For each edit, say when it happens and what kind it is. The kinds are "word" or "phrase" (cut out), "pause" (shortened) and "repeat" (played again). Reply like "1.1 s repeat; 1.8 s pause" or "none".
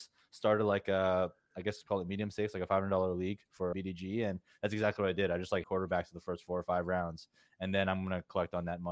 3.7 s word; 5.6 s word